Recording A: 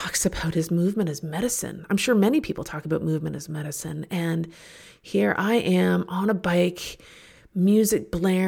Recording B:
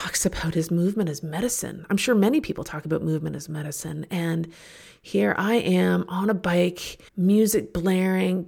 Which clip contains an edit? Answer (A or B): B